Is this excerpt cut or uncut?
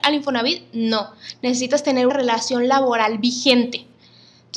cut